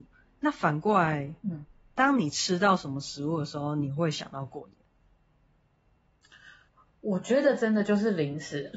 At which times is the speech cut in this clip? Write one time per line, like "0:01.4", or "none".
none

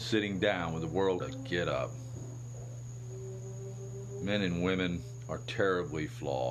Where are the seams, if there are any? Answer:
0:01.2

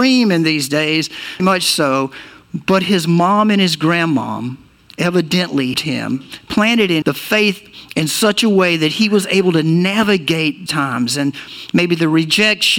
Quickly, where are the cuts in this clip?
0:01.4
0:05.7
0:07.0
0:10.7

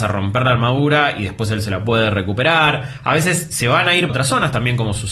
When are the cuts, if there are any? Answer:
0:04.1

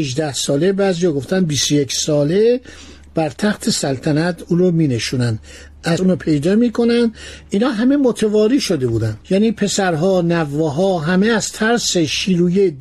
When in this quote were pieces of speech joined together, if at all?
0:06.0
0:09.2

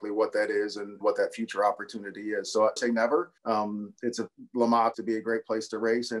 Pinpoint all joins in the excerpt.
0:01.0
0:02.8
0:03.4
0:04.9

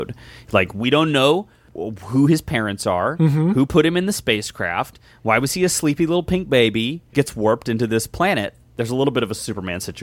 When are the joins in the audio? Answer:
0:07.1

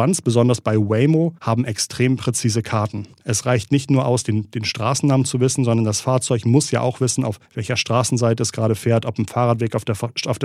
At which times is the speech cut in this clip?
0:01.4
0:03.1
0:07.5

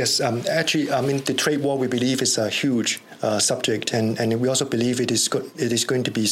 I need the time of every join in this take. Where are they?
none

